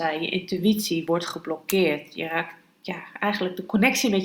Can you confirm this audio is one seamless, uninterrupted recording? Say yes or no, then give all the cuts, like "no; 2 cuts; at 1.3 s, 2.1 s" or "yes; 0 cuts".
yes; 0 cuts